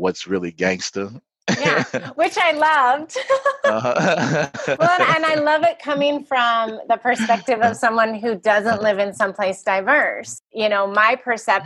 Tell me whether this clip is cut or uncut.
uncut